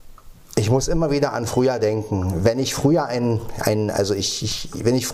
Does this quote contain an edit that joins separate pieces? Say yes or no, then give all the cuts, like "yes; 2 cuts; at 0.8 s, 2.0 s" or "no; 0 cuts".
no; 0 cuts